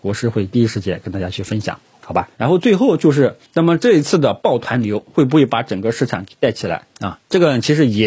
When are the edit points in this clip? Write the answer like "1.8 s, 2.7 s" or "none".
2.3 s, 3.5 s, 6.9 s